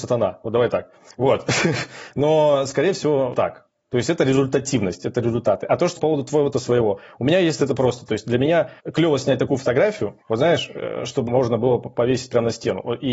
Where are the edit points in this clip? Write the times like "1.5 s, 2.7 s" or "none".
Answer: 3.3 s, 6.0 s, 6.5 s, 8.8 s, 10.2 s, 11.3 s